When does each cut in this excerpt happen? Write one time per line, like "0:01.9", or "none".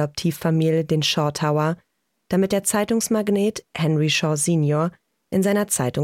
none